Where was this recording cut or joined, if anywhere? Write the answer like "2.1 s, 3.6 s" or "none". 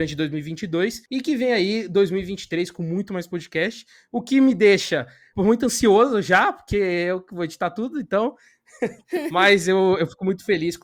none